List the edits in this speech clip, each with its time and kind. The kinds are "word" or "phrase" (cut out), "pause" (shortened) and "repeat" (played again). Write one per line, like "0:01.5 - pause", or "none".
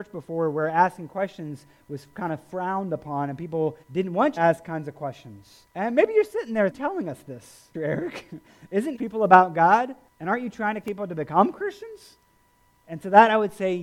0:03.8 - pause
0:04.4 - phrase
0:05.7 - pause
0:06.7 - phrase
0:07.7 - word
0:09.0 - phrase
0:10.1 - pause
0:10.8 - word